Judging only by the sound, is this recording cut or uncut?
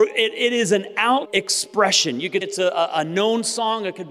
cut